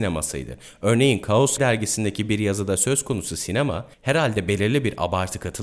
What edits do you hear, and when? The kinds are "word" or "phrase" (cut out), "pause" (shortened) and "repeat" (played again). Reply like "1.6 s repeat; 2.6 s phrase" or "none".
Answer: 1.6 s word; 3.9 s pause

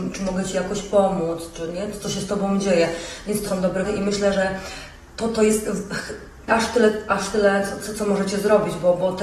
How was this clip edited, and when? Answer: 3.5 s word; 3.8 s word; 6.5 s word

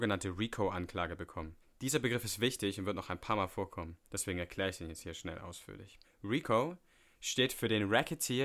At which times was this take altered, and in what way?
1.6 s pause; 4.0 s pause; 6.0 s pause

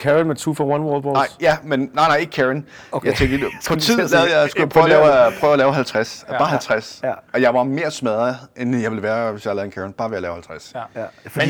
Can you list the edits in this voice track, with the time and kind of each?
7.3 s pause

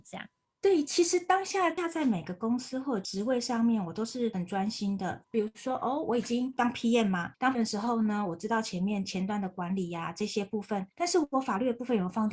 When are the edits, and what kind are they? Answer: 5.3 s pause; 7.5 s word

